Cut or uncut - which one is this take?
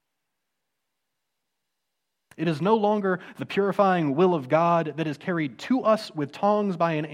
uncut